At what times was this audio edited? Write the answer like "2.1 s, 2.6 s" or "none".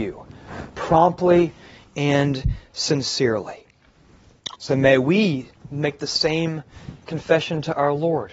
none